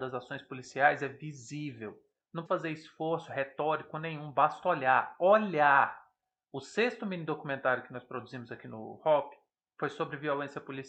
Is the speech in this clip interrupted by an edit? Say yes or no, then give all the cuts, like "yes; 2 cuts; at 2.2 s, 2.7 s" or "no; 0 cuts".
yes; 1 cut; at 2.5 s